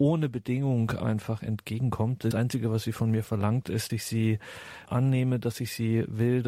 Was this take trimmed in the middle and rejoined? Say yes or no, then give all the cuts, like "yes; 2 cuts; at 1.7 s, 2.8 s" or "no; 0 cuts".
yes; 3 cuts; at 2.3 s, 3.9 s, 4.8 s